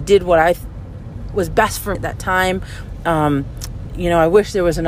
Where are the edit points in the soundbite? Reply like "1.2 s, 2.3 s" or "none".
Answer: 1.3 s, 1.9 s, 3.9 s